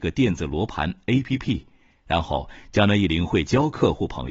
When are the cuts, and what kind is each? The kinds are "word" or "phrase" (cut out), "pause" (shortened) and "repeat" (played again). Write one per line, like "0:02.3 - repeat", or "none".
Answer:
none